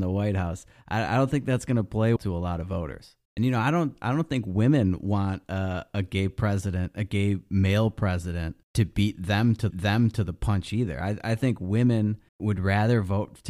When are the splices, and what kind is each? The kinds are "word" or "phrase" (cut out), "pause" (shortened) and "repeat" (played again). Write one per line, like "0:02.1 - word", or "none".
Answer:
0:02.2 - word
0:03.3 - pause
0:08.6 - pause
0:09.7 - repeat
0:12.3 - pause